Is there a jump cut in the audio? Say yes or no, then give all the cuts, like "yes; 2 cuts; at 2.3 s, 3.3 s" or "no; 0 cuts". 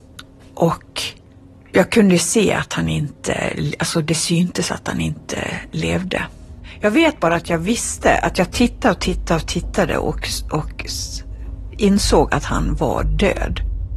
no; 0 cuts